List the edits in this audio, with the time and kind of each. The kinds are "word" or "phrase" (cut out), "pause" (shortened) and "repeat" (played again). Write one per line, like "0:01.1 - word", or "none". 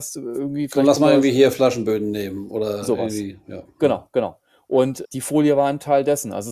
0:05.0 - word